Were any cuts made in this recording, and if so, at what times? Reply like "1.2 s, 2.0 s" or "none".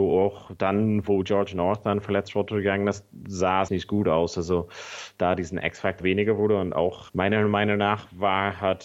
3.7 s, 6.0 s, 7.1 s